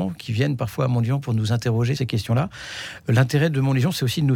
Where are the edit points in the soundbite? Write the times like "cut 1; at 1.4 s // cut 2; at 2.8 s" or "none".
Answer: cut 1; at 2.0 s